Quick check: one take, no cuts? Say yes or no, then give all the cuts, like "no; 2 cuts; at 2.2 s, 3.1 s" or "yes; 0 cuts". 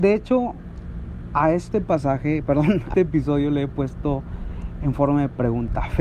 no; 1 cut; at 2.9 s